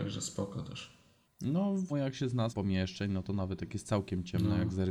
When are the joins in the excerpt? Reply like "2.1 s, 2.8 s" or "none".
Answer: 1.2 s, 1.9 s, 2.5 s